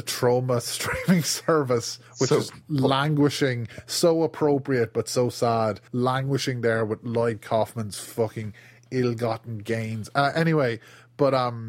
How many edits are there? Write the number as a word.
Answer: two